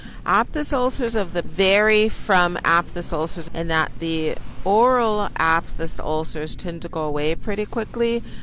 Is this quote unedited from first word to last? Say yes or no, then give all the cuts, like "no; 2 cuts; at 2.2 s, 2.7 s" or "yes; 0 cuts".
no; 2 cuts; at 1.4 s, 3.5 s